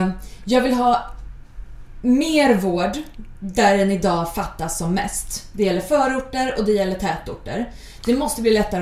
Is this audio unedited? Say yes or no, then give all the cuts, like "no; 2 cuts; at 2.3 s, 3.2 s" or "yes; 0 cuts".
yes; 0 cuts